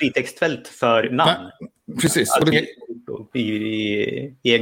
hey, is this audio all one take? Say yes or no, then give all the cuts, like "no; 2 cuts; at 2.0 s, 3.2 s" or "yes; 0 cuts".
no; 1 cut; at 2.5 s